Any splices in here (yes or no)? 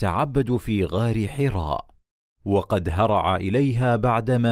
no